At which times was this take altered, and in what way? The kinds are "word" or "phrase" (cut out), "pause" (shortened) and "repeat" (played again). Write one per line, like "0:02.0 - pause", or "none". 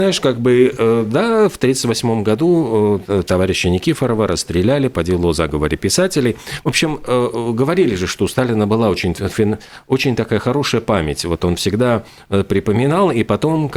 none